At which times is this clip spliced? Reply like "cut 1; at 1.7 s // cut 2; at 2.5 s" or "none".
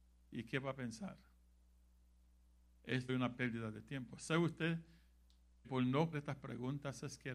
cut 1; at 3.1 s // cut 2; at 5.6 s // cut 3; at 6.1 s